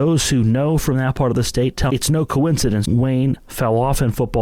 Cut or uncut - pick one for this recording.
cut